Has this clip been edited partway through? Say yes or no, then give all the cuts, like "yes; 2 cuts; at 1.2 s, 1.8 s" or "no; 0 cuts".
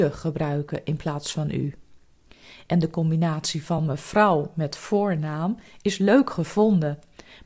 no; 0 cuts